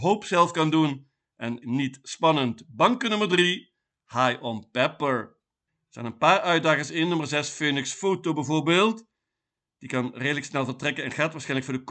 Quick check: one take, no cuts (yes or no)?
no